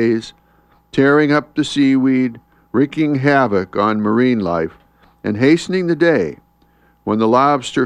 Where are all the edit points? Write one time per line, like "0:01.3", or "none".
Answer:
none